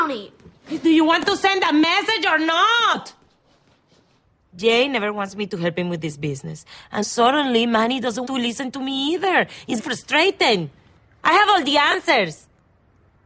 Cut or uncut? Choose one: cut